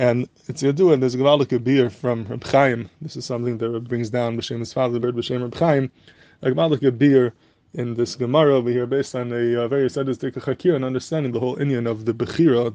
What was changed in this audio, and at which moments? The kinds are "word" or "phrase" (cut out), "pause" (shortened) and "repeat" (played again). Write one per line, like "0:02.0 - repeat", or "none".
0:03.9 - word
0:05.0 - phrase
0:11.3 - word